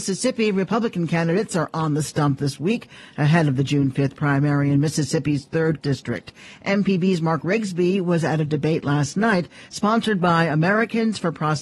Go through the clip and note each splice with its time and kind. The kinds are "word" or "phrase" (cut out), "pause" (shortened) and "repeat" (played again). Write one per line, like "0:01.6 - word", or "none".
0:05.8 - word